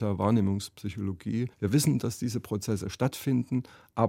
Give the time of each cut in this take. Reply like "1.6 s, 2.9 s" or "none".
1.5 s

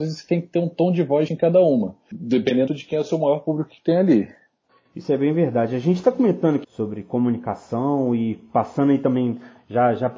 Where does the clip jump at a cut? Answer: 1.3 s, 2.7 s, 6.6 s

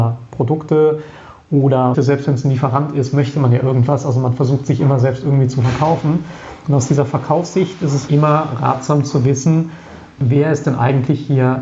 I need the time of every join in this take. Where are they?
1.9 s, 8.1 s

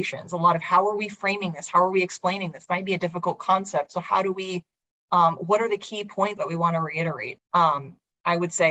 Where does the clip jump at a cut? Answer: 2.7 s, 6.4 s, 7.4 s

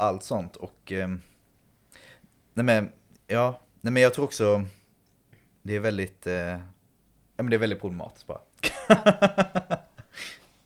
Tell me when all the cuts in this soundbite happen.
none

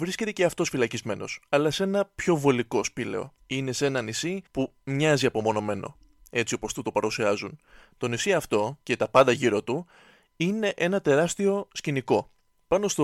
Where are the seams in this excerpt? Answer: 3.4 s, 4.5 s, 8.8 s

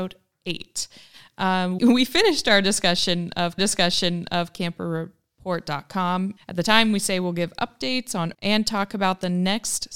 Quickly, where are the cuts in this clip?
1.8 s, 3.6 s, 6.4 s, 8.3 s

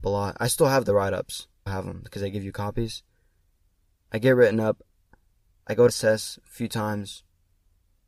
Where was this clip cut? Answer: 1.7 s, 5.9 s

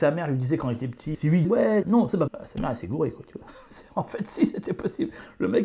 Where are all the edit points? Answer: 1.1 s, 1.4 s, 1.8 s, 2.3 s

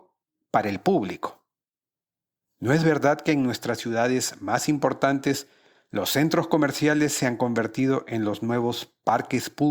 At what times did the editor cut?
none

